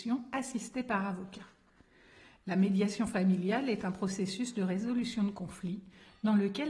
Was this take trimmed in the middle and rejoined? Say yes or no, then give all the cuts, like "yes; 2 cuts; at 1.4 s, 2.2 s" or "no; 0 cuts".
no; 0 cuts